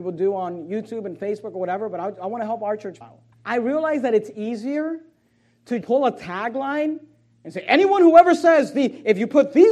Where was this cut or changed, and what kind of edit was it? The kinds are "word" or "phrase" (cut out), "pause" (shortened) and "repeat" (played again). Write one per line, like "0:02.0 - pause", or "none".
0:03.0 - word
0:03.3 - pause
0:05.8 - word